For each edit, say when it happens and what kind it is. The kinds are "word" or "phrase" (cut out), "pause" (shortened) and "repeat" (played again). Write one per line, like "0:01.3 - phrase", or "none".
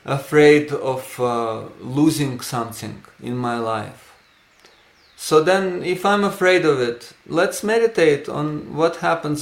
none